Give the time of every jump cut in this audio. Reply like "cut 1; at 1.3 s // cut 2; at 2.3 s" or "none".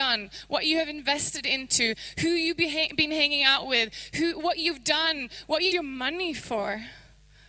cut 1; at 5.7 s